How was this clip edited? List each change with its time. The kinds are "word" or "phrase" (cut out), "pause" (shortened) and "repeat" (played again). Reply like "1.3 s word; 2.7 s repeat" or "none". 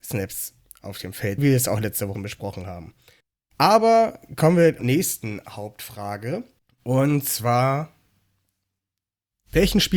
1.4 s phrase; 2.1 s word; 3.2 s pause; 4.8 s phrase; 6.6 s pause